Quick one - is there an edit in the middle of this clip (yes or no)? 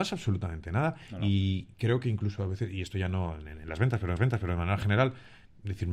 yes